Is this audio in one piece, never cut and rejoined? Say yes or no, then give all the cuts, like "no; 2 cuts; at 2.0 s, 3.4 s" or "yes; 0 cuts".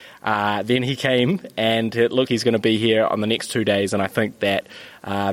no; 1 cut; at 2.3 s